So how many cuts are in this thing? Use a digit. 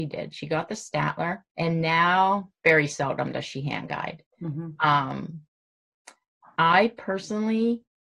2